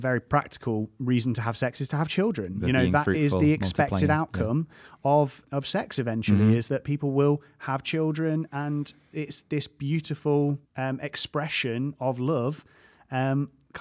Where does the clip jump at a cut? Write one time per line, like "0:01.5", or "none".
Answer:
0:05.4
0:08.5
0:10.6